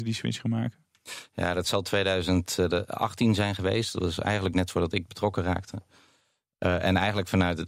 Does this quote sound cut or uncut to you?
uncut